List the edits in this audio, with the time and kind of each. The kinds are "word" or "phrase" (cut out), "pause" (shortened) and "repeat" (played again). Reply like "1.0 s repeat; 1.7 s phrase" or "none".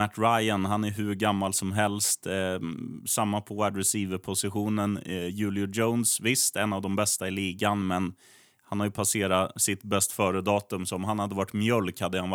none